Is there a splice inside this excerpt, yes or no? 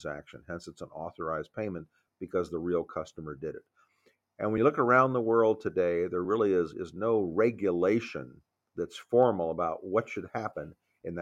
no